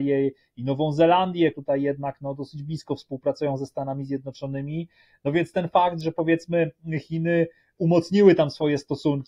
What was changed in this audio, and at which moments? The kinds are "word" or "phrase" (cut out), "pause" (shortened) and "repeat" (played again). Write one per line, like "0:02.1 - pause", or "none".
0:01.5 - word